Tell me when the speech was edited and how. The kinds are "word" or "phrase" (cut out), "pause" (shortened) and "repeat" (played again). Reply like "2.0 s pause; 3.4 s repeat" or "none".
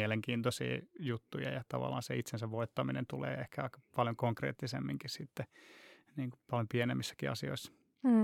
none